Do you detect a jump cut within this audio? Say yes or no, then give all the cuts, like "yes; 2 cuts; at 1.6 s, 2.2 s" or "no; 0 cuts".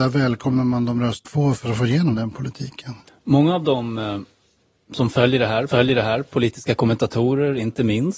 yes; 3 cuts; at 1.2 s, 3.1 s, 5.7 s